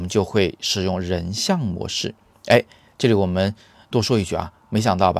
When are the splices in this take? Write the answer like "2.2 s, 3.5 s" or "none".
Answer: none